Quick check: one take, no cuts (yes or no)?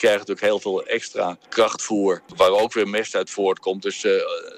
no